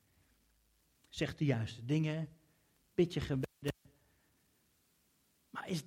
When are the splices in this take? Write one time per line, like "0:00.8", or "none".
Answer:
none